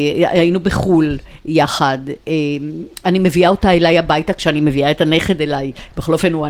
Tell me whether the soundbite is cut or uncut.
uncut